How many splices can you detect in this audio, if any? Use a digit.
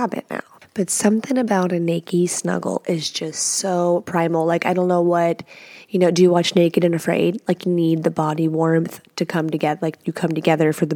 1